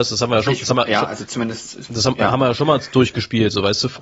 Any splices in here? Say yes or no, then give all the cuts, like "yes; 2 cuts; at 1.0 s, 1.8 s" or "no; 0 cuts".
no; 0 cuts